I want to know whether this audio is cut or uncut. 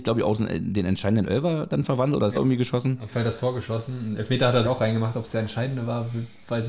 cut